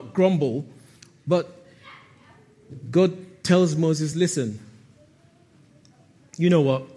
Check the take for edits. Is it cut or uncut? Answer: uncut